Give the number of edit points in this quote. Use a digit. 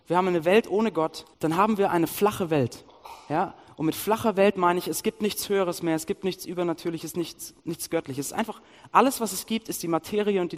2